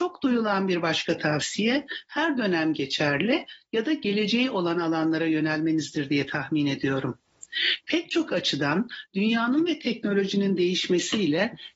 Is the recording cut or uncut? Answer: uncut